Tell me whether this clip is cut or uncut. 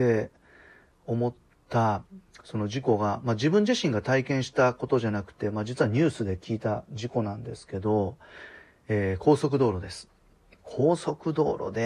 uncut